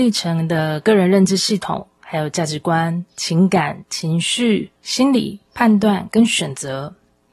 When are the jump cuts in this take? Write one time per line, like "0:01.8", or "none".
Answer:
0:01.9
0:03.1
0:04.8
0:05.5

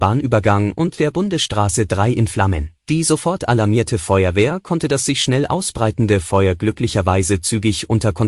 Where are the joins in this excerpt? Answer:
0:02.8

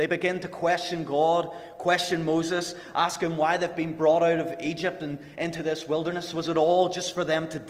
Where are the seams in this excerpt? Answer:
none

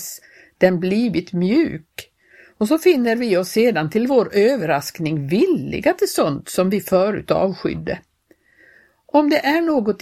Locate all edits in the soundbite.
none

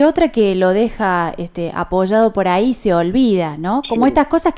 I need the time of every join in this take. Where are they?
none

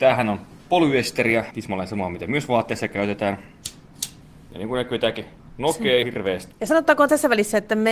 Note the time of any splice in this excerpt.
0:01.5
0:06.0

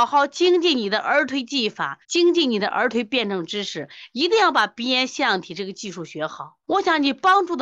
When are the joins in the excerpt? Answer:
0:02.0
0:06.6

